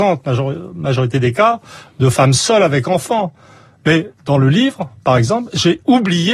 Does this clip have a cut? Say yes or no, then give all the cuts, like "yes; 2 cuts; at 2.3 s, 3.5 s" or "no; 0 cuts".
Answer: no; 0 cuts